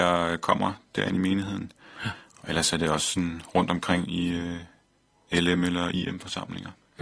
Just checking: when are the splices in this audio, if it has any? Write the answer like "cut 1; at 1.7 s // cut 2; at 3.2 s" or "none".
none